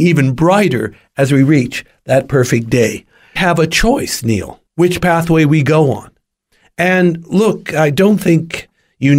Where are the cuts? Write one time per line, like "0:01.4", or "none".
0:03.4
0:04.7